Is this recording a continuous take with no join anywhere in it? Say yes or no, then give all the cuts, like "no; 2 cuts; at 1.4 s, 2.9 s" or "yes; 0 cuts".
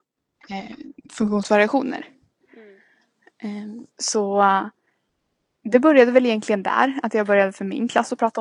no; 1 cut; at 3.9 s